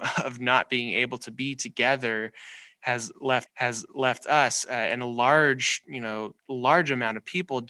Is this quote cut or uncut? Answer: cut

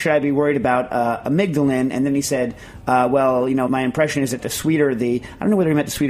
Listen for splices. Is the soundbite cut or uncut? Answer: cut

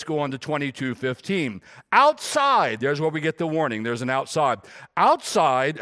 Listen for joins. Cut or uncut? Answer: uncut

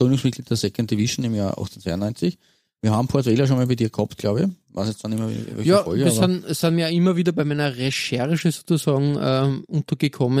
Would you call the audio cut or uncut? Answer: uncut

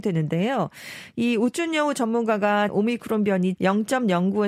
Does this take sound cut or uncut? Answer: cut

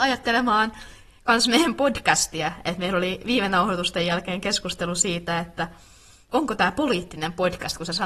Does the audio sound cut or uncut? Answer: uncut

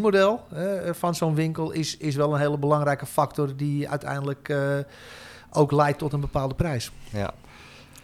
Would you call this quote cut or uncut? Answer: uncut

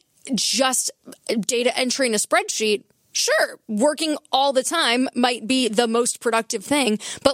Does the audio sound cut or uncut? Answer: uncut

